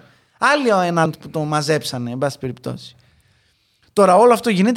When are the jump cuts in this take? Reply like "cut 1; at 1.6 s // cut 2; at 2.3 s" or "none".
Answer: cut 1; at 1.1 s